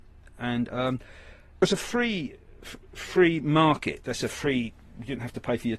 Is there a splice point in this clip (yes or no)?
yes